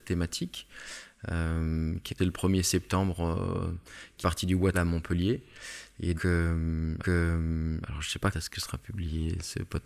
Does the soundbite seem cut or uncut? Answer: cut